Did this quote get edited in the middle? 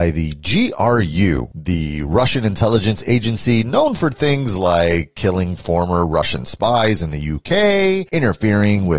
no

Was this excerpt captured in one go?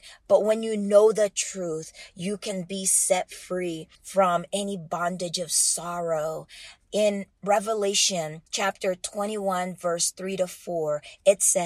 no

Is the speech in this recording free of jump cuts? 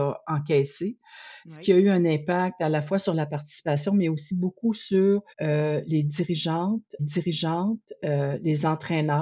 no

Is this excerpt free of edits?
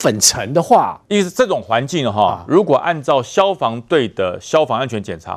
no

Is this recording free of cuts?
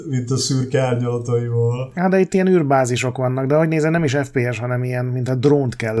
yes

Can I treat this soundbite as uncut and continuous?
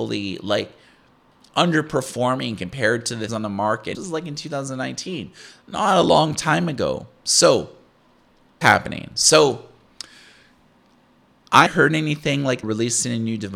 no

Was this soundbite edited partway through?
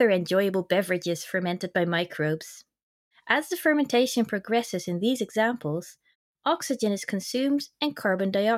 no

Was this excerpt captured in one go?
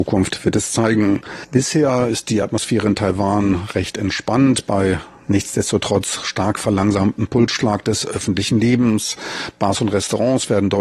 yes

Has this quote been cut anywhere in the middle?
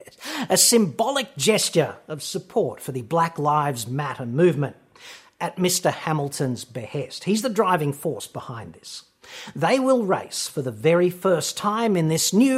no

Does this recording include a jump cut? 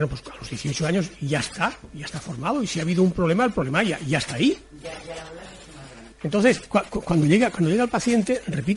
yes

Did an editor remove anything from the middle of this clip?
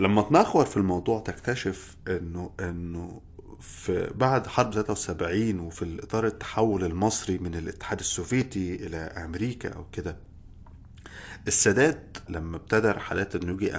yes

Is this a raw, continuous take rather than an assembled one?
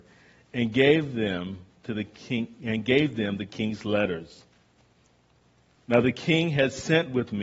yes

